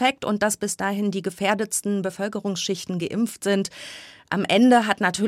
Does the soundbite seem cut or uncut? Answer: uncut